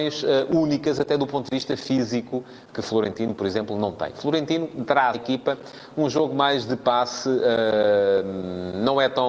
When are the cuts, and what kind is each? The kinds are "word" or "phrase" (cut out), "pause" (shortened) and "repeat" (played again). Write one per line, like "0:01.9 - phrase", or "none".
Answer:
0:05.1 - word